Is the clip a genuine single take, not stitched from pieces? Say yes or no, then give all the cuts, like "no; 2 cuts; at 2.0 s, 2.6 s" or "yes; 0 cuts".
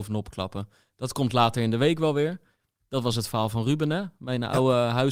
yes; 0 cuts